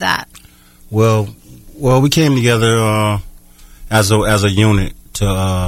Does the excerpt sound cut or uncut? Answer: uncut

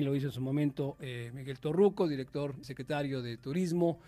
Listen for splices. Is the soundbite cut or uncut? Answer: cut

